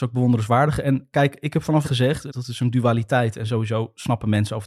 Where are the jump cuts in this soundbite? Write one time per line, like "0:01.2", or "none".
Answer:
0:01.8
0:02.3